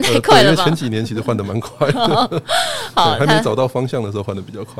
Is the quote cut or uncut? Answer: uncut